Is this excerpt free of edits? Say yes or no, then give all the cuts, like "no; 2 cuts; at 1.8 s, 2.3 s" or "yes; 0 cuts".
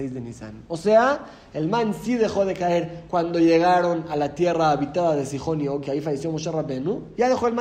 yes; 0 cuts